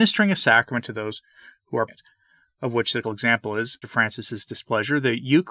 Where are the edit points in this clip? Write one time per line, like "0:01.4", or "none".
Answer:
0:01.9
0:03.0
0:03.8

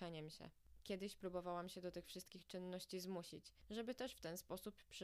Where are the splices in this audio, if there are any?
none

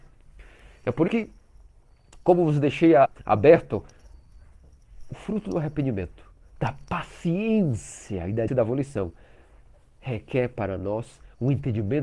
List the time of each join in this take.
0:01.1
0:03.1
0:08.5

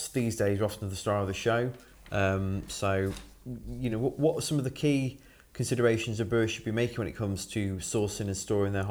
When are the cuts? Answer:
none

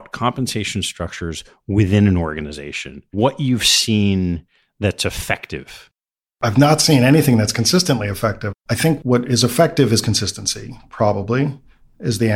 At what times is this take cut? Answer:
0:03.1

